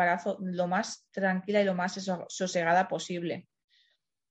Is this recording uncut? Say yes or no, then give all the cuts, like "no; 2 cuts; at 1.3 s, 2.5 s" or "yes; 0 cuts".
yes; 0 cuts